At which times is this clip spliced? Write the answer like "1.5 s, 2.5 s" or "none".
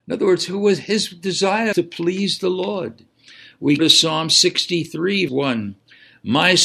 1.7 s, 3.8 s, 5.3 s